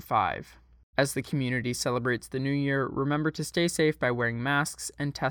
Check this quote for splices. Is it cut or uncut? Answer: uncut